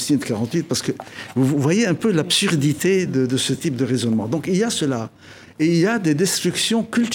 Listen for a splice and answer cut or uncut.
uncut